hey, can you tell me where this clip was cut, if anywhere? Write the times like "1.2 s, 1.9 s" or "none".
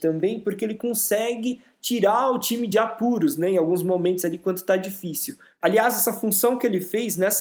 none